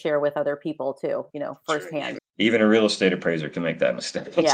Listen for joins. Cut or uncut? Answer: cut